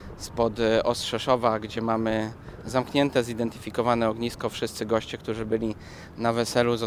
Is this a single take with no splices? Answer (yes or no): yes